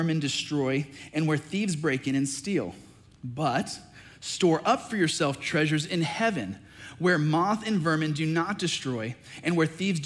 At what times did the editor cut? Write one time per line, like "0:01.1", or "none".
none